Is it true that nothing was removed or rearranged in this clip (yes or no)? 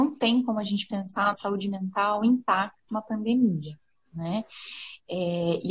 no